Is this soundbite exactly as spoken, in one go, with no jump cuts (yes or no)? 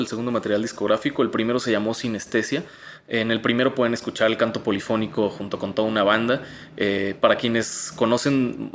yes